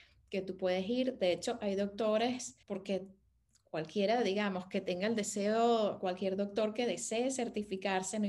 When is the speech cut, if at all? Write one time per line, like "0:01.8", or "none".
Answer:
0:02.6